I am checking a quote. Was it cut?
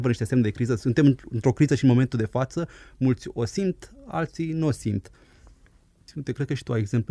no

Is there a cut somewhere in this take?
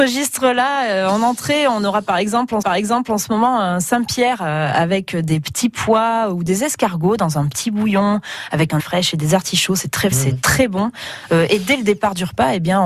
yes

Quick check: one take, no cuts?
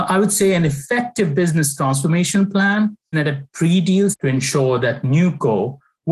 no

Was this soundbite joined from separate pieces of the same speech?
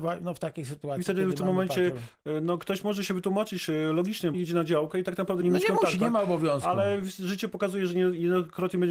yes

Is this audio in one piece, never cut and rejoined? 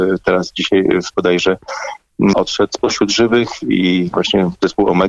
no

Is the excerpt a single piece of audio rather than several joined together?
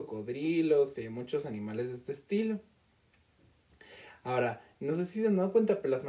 yes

